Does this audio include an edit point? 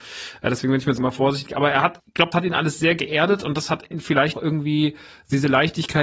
yes; 5 cuts; at 1.0 s, 2.0 s, 2.3 s, 3.9 s, 4.3 s

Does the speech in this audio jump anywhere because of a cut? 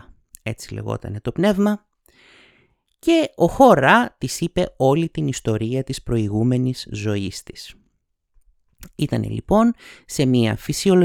no; 0 cuts

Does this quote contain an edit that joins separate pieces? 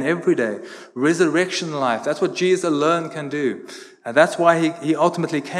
no; 0 cuts

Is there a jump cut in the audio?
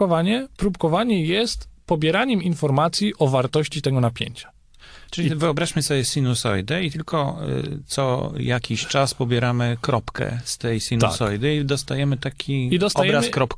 yes; 1 cut; at 5.1 s

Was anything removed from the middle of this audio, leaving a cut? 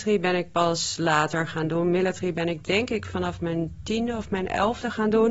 no; 0 cuts

